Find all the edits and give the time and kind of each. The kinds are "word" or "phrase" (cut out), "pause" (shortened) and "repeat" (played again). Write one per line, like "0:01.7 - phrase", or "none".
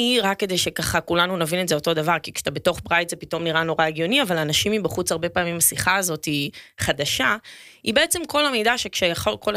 none